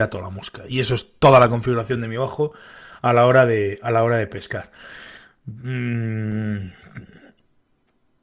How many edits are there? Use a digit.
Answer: 0